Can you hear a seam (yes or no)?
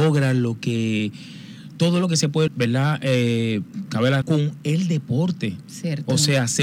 yes